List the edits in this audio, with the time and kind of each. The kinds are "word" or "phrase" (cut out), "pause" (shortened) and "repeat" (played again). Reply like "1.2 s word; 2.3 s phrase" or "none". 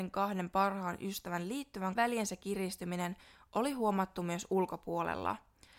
2.0 s phrase